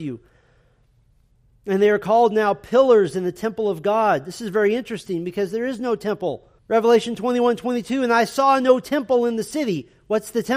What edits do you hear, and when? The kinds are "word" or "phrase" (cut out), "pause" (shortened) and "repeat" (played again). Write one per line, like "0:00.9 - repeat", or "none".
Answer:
0:06.6 - pause